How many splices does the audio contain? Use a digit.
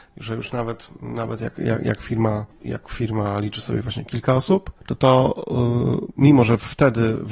1